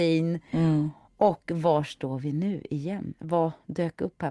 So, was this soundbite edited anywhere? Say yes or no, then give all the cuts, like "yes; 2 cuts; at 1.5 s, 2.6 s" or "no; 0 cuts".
no; 0 cuts